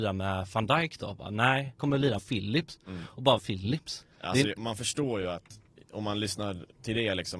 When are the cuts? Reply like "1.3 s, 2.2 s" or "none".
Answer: 1.8 s, 2.2 s, 3.4 s, 4.1 s, 4.6 s, 5.7 s